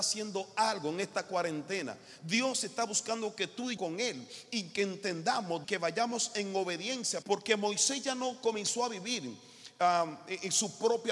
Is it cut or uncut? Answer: cut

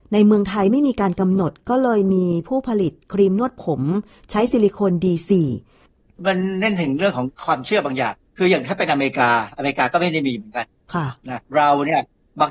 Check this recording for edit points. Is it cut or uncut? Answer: cut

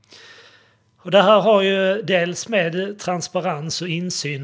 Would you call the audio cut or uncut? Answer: uncut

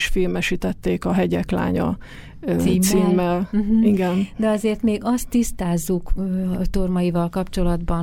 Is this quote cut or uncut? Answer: uncut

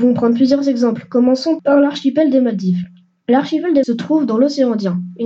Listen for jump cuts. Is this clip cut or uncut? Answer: cut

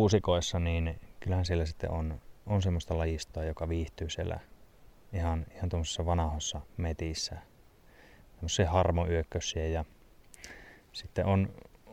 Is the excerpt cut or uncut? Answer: uncut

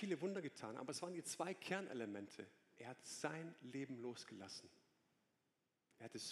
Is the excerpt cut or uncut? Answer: uncut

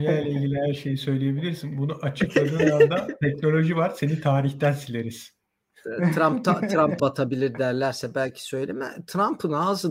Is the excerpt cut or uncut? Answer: cut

